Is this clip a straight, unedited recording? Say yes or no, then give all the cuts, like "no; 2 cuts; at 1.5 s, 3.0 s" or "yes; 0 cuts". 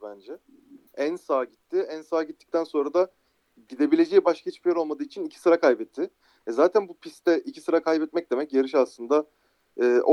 yes; 0 cuts